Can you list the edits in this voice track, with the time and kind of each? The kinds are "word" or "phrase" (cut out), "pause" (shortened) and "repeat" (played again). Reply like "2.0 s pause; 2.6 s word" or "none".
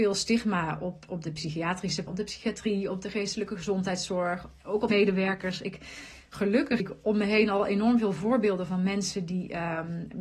1.1 s word; 2.1 s word; 4.9 s word; 6.8 s word